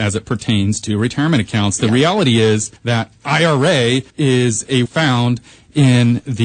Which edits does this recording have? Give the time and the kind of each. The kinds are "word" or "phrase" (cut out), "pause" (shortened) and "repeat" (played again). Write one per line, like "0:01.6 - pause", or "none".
0:02.8 - pause
0:04.1 - pause
0:04.9 - word